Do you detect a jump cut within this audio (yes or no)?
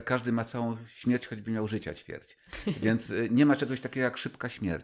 no